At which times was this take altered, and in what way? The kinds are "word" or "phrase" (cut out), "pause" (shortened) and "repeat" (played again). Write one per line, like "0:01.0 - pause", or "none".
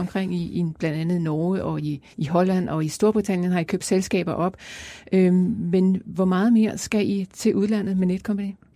0:02.1 - pause